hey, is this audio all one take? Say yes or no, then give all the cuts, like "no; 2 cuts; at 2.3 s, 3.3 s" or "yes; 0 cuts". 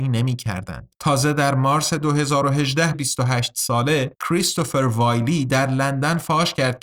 no; 3 cuts; at 0.9 s, 2.9 s, 4.1 s